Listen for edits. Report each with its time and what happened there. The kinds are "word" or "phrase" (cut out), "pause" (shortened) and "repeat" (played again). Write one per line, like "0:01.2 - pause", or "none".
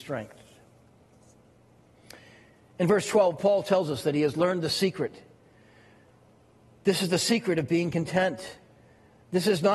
none